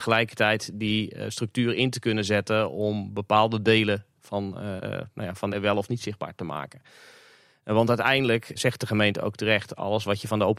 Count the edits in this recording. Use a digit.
3